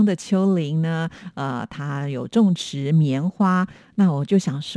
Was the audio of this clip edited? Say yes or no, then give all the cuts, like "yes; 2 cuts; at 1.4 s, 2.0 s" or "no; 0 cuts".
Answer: no; 0 cuts